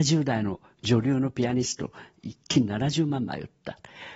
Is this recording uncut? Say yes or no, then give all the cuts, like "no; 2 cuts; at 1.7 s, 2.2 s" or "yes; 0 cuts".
yes; 0 cuts